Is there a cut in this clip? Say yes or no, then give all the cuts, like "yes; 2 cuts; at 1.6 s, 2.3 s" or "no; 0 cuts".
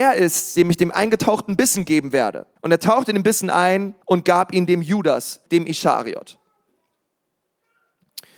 yes; 3 cuts; at 2.6 s, 4.0 s, 5.5 s